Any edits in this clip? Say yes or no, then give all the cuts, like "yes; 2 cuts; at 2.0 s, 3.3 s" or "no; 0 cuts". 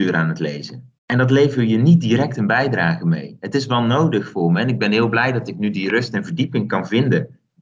yes; 1 cut; at 1.0 s